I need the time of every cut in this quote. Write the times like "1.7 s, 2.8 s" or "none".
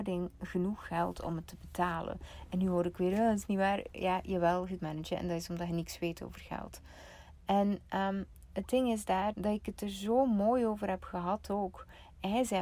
4.8 s, 9.3 s